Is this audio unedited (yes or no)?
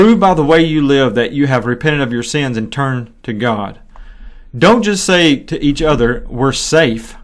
yes